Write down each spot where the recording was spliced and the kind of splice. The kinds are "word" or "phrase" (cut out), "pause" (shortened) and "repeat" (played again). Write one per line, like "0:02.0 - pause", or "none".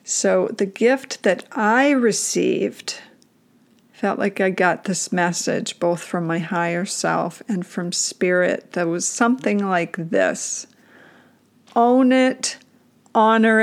none